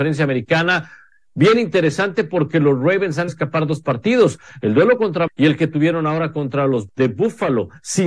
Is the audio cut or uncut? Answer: cut